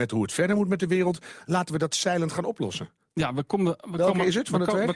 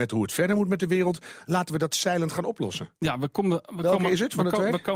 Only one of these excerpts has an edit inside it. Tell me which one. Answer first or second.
second